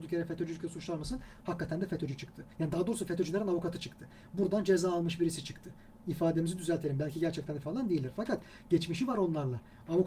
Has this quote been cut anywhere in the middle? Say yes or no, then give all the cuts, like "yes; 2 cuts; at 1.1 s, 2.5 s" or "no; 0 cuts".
yes; 1 cut; at 7.6 s